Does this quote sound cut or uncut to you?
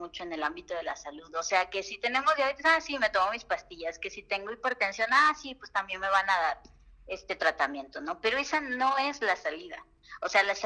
uncut